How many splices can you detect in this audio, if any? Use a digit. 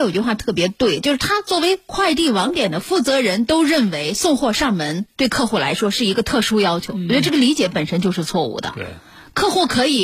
0